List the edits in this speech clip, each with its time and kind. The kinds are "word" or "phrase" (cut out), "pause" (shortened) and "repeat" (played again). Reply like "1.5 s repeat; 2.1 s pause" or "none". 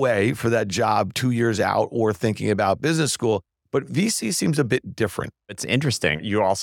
none

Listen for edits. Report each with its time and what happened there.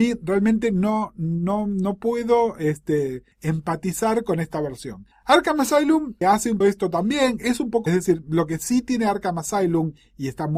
3.3 s pause; 5.1 s pause; 6.2 s word; 6.6 s word; 7.9 s phrase

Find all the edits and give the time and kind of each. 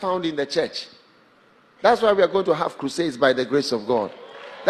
none

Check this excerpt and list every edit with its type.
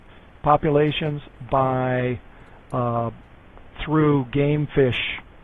none

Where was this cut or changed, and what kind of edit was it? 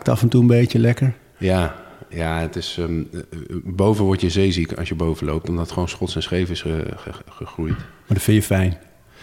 none

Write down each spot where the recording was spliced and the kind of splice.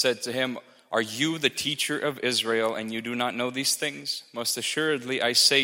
none

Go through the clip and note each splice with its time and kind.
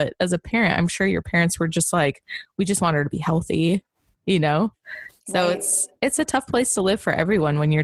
none

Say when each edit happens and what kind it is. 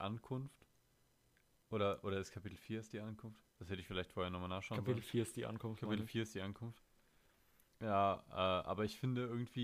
none

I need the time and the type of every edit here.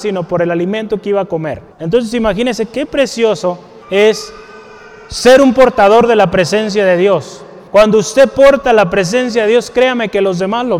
1.7 s pause; 3.8 s pause; 7.7 s pause

